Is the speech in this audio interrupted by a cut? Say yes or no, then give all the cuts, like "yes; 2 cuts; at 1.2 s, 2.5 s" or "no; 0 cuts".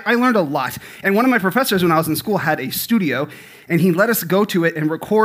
no; 0 cuts